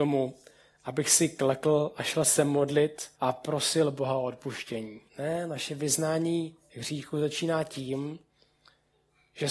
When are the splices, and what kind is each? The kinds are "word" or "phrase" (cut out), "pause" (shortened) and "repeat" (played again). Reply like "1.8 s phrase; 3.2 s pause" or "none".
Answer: 3.1 s pause; 5.1 s pause

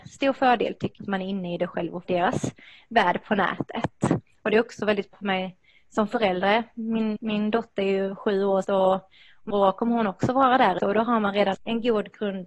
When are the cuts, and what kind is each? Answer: 1.0 s word; 2.0 s word; 5.1 s word; 7.2 s word; 8.6 s word; 9.5 s word; 10.8 s word; 11.5 s word

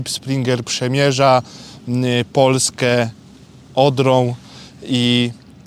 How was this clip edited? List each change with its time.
none

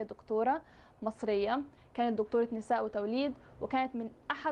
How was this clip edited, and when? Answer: none

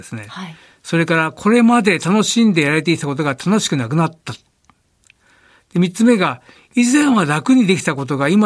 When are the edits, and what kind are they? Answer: none

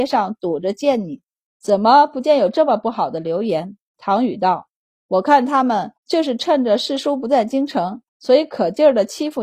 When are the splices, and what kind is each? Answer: 3.9 s pause; 6.0 s pause; 8.1 s pause

